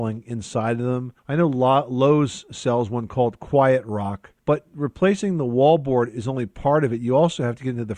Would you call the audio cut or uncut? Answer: cut